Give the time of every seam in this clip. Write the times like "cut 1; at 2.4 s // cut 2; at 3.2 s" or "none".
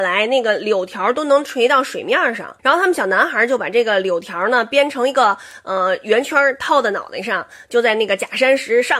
cut 1; at 2.6 s